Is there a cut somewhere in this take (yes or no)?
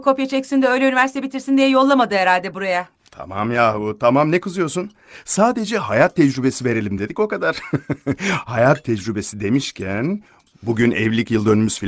no